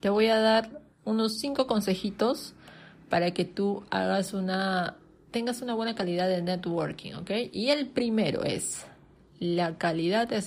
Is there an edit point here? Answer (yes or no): no